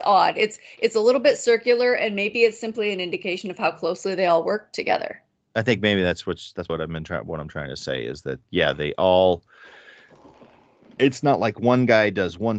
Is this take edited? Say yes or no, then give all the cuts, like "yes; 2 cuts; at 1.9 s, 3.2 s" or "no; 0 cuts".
yes; 1 cut; at 6.7 s